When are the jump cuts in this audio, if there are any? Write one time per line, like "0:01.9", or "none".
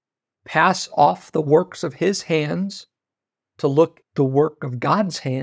0:04.0